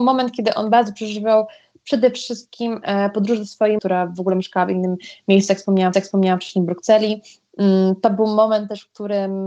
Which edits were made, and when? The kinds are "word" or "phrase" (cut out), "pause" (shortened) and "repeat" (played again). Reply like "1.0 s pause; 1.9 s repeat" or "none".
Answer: 3.8 s word; 5.9 s repeat